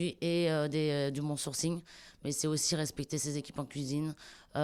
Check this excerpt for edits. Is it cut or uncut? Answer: uncut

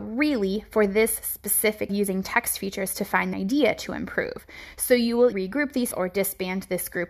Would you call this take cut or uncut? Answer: cut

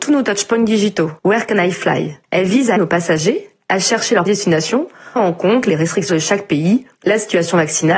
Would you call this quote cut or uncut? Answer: cut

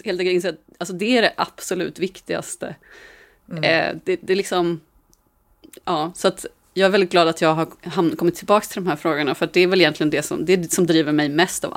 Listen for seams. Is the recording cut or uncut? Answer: uncut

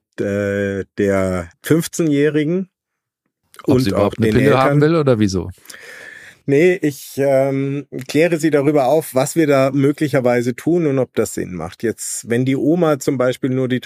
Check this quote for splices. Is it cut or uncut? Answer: cut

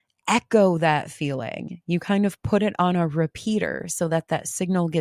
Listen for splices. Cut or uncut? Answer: uncut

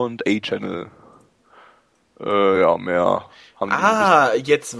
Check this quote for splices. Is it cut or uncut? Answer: uncut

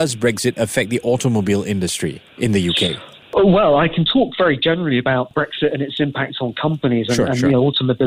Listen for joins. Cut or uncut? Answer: uncut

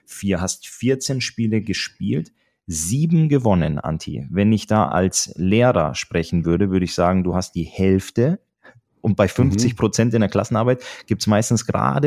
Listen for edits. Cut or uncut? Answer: uncut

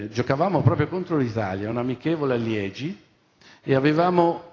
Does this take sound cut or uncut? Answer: uncut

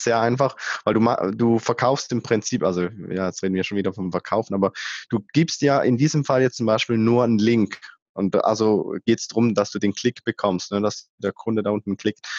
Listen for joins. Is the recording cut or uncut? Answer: uncut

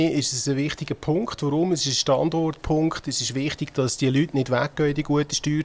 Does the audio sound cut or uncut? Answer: uncut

